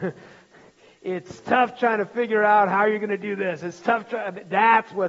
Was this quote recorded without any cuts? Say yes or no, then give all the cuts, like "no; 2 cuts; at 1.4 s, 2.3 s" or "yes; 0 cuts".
yes; 0 cuts